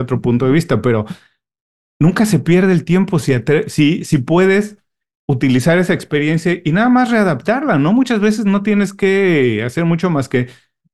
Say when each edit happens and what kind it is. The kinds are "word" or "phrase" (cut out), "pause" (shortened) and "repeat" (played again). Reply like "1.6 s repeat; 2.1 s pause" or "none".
none